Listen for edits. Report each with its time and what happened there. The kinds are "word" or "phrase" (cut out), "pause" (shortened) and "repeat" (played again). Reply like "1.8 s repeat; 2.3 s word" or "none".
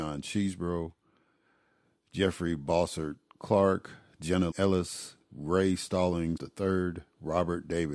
4.5 s word; 6.4 s word